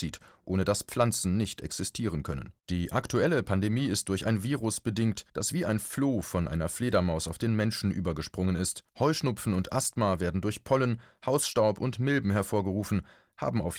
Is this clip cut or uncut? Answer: cut